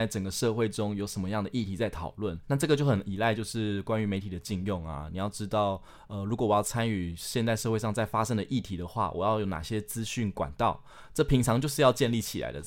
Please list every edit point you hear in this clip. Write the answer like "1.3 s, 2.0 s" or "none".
2.4 s